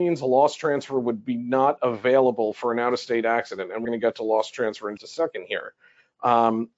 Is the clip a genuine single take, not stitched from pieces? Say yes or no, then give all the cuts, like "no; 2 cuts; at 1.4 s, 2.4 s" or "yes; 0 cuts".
no; 2 cuts; at 3.8 s, 5.0 s